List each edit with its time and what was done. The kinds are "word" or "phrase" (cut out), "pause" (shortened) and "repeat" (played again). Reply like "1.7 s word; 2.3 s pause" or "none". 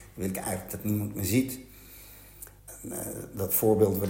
2.6 s pause